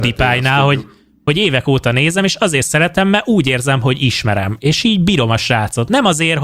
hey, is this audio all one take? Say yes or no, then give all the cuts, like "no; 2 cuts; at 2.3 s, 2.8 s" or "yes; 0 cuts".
yes; 0 cuts